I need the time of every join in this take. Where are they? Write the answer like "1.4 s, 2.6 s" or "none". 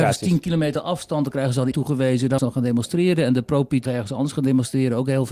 1.7 s, 2.4 s, 3.9 s